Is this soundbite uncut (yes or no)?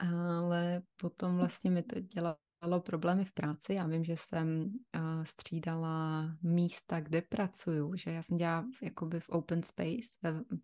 yes